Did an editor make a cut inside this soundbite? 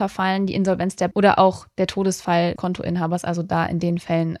yes; 2 cuts; at 1.1 s, 2.6 s

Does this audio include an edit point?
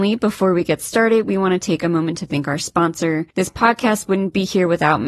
yes; 1 cut; at 3.3 s

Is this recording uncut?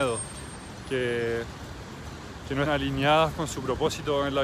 no; 1 cut; at 2.7 s

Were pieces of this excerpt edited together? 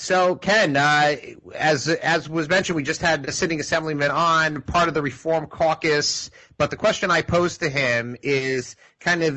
no; 0 cuts

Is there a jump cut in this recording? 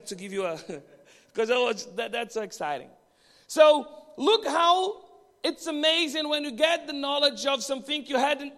no; 0 cuts

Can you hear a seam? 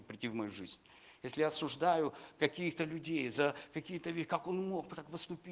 no; 0 cuts

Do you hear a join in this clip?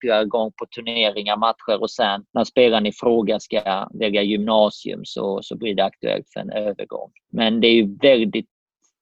yes; 2 cuts; at 2.3 s, 7.2 s

